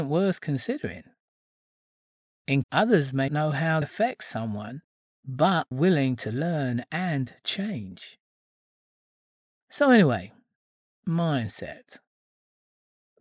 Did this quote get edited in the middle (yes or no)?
yes